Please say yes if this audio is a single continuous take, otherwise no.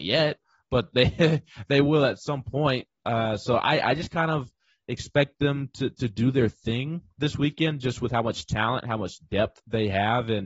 yes